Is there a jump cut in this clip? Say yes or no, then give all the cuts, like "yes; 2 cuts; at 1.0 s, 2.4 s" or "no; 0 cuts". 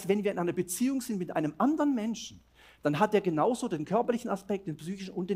no; 0 cuts